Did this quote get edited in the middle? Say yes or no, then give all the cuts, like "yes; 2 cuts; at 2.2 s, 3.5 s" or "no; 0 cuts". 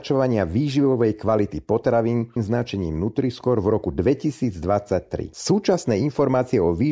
yes; 1 cut; at 2.4 s